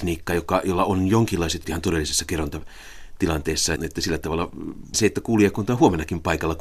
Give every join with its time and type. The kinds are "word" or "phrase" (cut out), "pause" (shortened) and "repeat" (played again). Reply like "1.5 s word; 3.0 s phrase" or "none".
1.6 s word; 3.8 s word; 4.9 s word